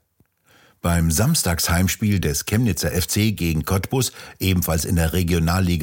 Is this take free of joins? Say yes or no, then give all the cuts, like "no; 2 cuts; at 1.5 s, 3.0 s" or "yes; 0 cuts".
yes; 0 cuts